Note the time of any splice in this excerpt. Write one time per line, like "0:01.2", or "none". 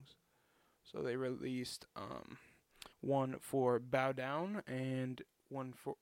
0:02.9